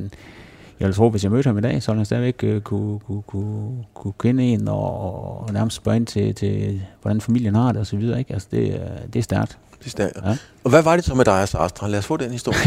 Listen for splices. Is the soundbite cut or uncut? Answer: uncut